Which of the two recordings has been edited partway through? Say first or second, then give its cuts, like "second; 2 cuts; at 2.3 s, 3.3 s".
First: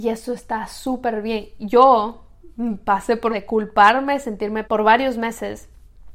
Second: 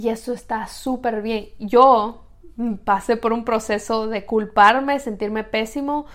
first; 2 cuts; at 3.3 s, 4.6 s